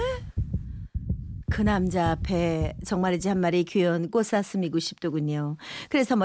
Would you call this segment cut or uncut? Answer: uncut